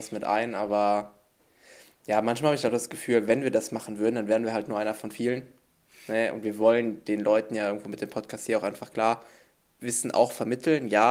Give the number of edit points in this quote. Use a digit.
0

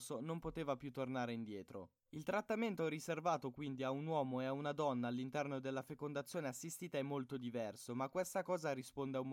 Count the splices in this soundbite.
0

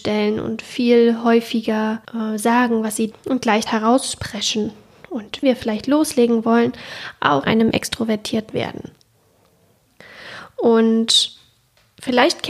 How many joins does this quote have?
6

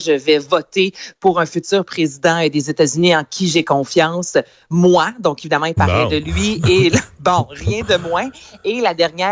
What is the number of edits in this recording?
0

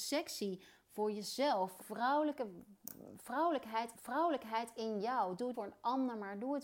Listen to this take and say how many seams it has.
3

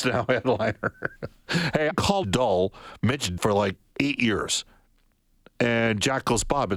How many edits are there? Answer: 3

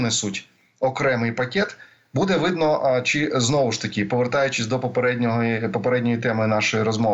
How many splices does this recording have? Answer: 0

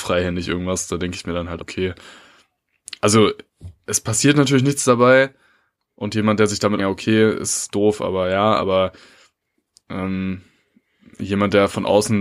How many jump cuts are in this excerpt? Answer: 2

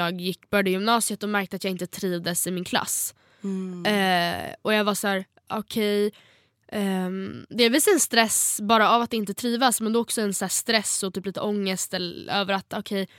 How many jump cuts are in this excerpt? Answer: 0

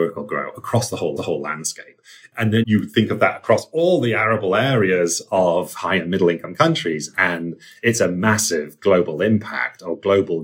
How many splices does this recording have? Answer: 2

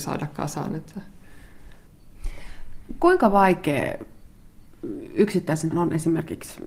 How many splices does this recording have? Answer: 1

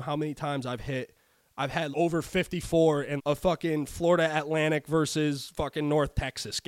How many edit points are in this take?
2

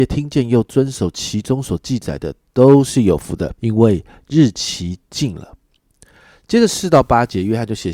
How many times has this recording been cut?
1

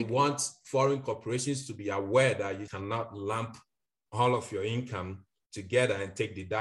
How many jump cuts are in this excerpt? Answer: 1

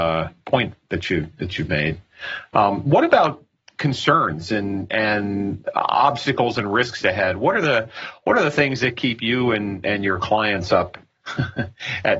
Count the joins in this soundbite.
0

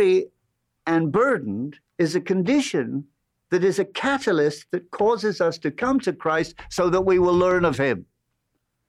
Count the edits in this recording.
1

